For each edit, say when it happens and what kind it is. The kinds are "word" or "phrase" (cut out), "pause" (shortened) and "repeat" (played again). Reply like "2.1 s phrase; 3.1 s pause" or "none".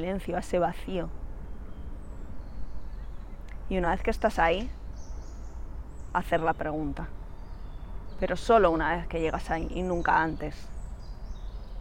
none